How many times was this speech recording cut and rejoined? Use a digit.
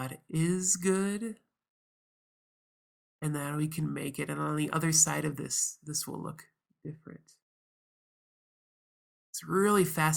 0